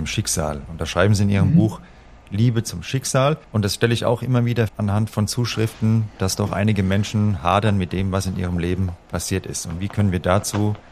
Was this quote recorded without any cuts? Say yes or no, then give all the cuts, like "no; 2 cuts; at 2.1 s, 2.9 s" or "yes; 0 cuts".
no; 2 cuts; at 3.4 s, 4.7 s